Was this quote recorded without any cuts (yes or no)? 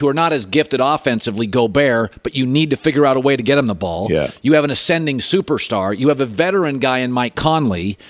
yes